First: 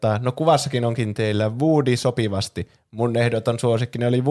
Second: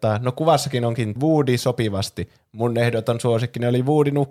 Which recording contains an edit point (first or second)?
second